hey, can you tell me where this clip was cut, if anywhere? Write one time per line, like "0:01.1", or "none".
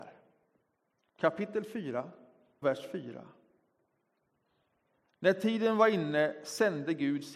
0:02.6